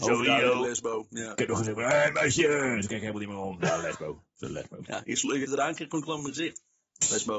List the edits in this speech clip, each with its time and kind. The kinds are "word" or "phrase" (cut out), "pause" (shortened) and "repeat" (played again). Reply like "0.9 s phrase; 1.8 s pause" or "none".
5.4 s phrase